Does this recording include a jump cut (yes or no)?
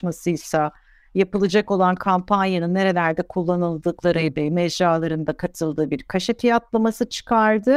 no